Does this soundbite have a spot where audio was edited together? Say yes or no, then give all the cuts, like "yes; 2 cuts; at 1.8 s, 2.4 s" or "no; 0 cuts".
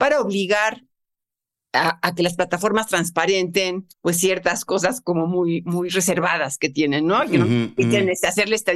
yes; 1 cut; at 3.9 s